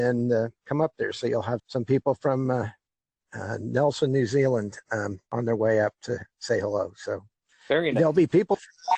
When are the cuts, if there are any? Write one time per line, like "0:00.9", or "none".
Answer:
0:01.6
0:05.3